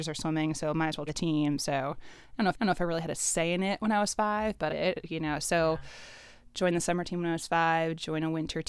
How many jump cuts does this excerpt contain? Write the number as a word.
three